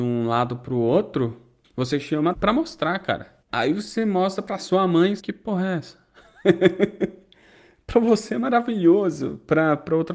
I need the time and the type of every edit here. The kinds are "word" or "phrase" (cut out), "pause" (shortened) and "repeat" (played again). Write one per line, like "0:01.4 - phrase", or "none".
0:01.6 - pause
0:02.3 - phrase
0:03.4 - pause
0:05.2 - phrase